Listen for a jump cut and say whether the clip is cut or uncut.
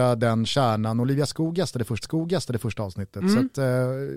cut